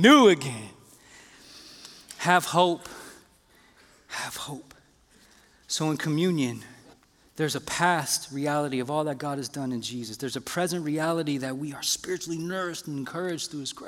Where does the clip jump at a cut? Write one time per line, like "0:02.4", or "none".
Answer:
none